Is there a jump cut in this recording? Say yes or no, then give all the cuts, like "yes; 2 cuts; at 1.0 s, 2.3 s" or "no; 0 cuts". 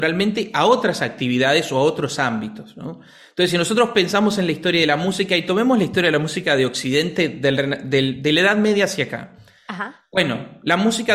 no; 0 cuts